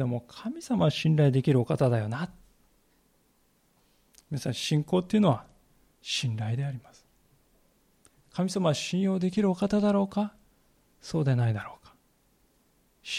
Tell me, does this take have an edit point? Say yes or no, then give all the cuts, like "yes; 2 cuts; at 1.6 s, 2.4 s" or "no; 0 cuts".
no; 0 cuts